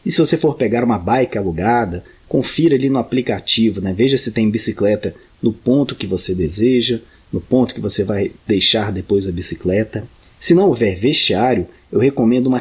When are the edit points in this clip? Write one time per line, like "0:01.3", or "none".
none